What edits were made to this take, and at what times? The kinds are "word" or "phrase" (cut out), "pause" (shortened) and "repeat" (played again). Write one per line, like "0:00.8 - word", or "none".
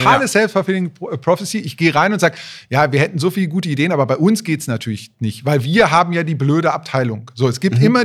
none

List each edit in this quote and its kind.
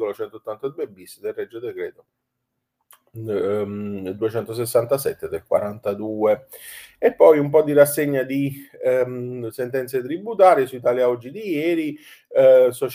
none

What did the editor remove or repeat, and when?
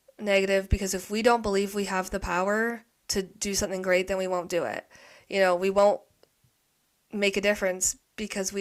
none

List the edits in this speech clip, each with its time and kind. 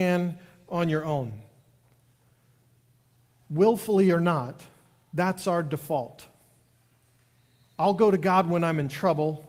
none

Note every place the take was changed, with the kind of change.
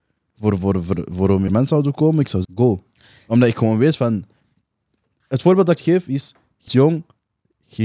0:01.5 - word
0:02.4 - word
0:05.8 - word
0:06.7 - word

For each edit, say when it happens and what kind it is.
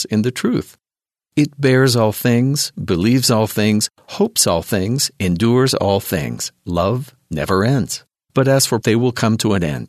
0:06.6 - pause
0:08.2 - pause
0:08.8 - word

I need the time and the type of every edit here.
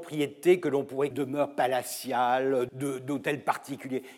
0:01.1 - phrase
0:02.7 - word

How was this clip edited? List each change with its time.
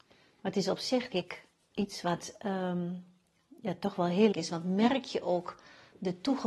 0:01.1 - word
0:04.3 - phrase

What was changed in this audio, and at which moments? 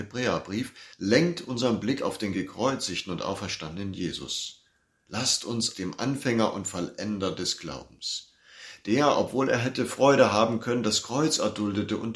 0:00.9 - pause
0:05.7 - phrase

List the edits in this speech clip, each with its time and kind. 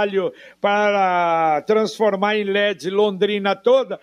none

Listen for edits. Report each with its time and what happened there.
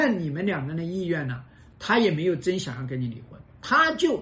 none

